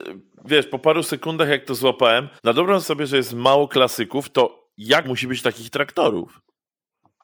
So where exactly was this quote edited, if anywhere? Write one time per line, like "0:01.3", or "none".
0:02.4
0:02.8
0:05.0